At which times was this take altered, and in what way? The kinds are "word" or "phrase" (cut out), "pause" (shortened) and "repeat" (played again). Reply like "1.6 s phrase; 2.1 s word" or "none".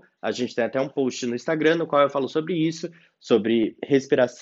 none